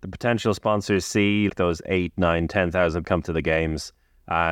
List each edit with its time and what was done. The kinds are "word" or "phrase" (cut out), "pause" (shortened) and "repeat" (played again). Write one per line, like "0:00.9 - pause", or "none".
0:01.5 - word
0:03.0 - word